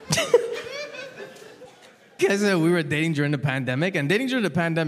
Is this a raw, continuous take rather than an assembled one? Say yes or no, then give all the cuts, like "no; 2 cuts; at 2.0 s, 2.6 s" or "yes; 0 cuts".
no; 1 cut; at 2.2 s